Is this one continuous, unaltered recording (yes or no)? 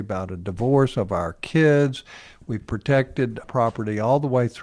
no